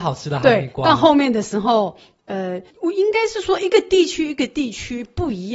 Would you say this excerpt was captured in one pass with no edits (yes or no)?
no